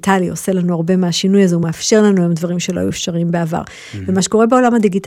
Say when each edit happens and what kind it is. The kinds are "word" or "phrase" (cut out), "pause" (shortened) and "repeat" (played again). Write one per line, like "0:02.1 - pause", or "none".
none